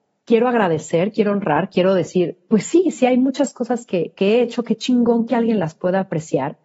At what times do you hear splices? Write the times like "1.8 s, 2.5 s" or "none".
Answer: none